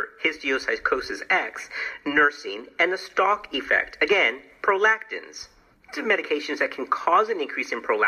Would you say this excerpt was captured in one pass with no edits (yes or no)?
no